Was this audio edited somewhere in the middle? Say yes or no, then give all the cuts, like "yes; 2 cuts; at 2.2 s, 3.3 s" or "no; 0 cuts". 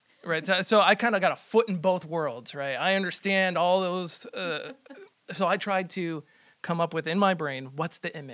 no; 0 cuts